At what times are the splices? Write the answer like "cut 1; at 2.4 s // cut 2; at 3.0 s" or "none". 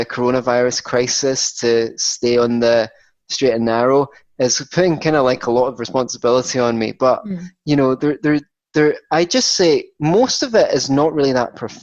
none